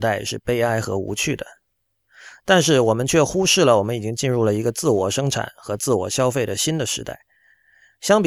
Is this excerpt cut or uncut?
uncut